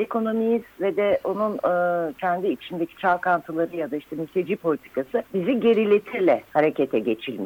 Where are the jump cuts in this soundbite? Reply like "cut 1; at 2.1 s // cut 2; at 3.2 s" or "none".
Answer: cut 1; at 5.3 s